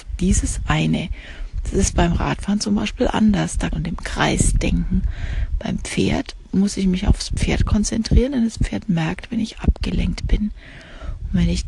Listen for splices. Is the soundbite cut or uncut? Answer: cut